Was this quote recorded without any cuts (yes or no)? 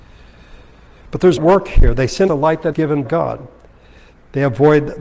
no